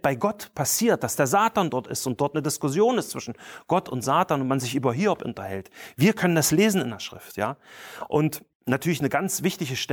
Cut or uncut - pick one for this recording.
cut